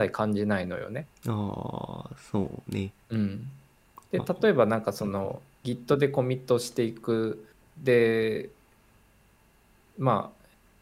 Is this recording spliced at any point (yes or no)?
yes